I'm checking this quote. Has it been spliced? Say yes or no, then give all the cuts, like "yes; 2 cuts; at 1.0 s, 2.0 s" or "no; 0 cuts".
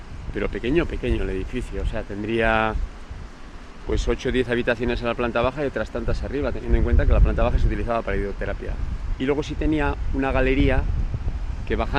no; 0 cuts